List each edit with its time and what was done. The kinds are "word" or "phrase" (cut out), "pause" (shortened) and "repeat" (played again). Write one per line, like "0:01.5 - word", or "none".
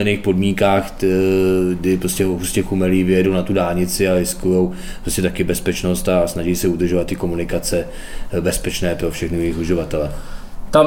none